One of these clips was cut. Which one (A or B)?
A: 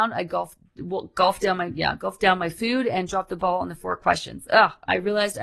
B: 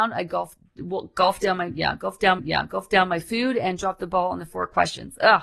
B